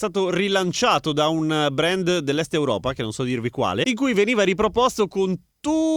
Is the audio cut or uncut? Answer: uncut